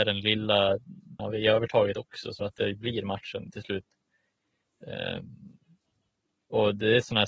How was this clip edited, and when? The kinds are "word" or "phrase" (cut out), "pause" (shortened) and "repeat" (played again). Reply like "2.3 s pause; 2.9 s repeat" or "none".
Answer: 1.2 s word; 2.4 s word